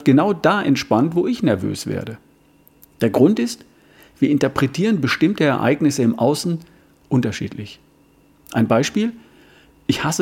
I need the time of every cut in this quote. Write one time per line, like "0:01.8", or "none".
none